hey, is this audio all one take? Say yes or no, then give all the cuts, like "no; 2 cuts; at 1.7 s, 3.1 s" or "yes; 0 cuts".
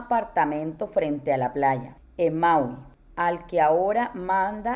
yes; 0 cuts